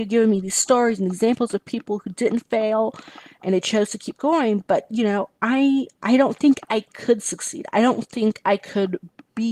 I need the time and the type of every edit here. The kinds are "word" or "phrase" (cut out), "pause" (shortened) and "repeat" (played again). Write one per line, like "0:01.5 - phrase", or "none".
none